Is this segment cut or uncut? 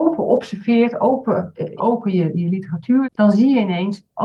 cut